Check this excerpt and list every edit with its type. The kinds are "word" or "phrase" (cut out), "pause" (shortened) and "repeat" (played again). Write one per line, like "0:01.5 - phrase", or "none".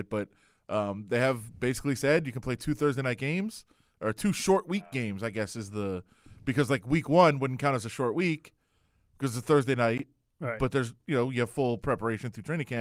none